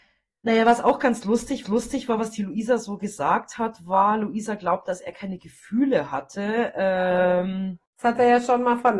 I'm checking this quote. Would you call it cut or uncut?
cut